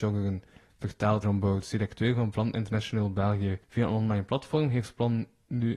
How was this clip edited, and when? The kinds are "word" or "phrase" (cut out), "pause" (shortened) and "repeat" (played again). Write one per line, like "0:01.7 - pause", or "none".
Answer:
0:01.2 - word
0:03.6 - pause